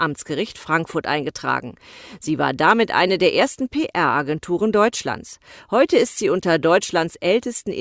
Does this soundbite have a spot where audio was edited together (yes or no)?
no